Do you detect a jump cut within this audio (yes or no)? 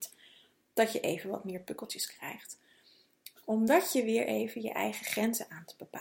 no